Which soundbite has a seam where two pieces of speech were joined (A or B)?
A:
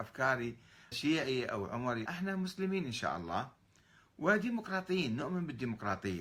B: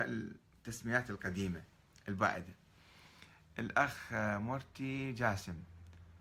A